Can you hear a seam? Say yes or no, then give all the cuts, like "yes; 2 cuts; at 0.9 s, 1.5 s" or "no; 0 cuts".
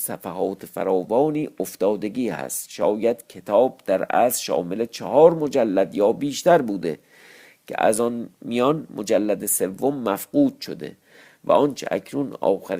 no; 0 cuts